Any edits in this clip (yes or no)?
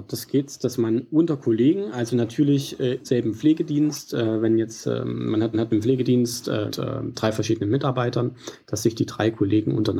yes